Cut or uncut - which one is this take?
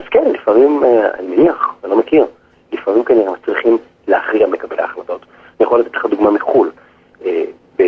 cut